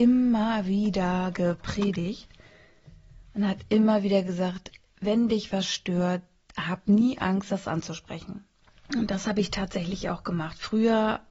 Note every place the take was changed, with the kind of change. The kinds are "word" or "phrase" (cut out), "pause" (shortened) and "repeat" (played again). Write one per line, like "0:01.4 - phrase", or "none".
none